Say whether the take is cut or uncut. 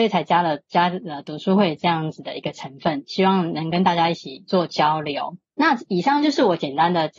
cut